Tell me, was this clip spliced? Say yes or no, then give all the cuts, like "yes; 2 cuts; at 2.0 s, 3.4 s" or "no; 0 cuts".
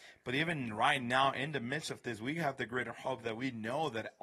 no; 0 cuts